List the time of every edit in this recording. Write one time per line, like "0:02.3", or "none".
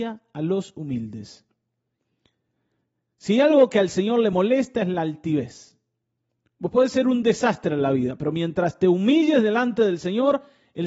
none